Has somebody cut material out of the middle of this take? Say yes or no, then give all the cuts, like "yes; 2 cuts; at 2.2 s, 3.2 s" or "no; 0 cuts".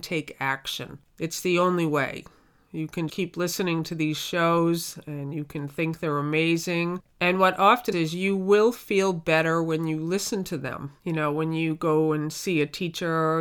yes; 4 cuts; at 3.1 s, 7.1 s, 7.9 s, 11.0 s